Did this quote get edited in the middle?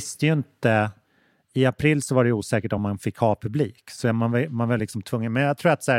no; 0 cuts

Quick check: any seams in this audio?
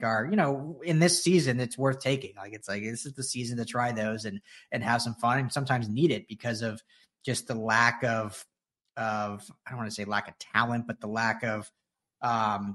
no; 0 cuts

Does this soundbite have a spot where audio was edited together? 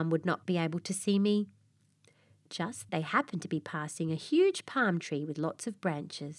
yes; 1 cut; at 2.9 s

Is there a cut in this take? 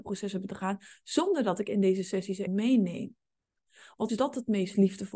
yes; 2 cuts; at 2.5 s, 4.1 s

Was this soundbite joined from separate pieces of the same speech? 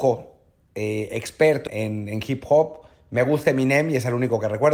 yes; 1 cut; at 1.7 s

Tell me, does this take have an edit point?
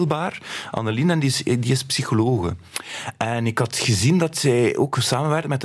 no; 0 cuts

